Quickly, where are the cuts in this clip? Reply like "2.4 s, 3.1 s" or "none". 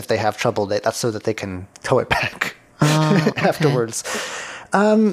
none